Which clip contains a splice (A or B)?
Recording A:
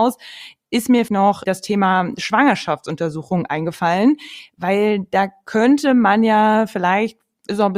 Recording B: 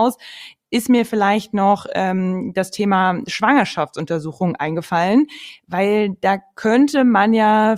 A